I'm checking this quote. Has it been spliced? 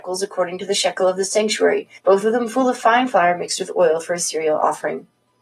yes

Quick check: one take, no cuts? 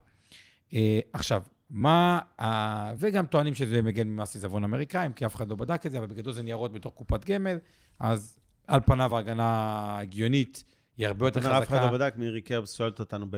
yes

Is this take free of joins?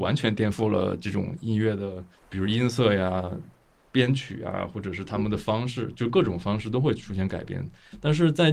no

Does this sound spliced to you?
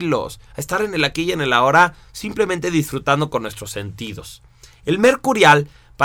no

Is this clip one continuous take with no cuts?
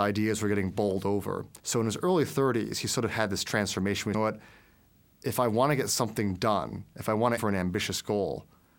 no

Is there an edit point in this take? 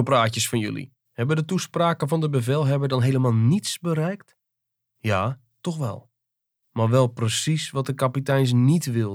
yes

